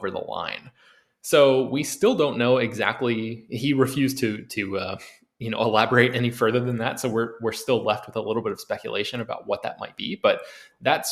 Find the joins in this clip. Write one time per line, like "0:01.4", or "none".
none